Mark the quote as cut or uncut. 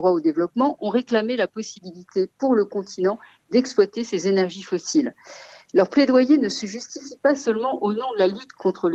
uncut